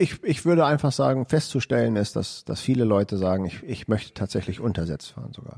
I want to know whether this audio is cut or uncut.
uncut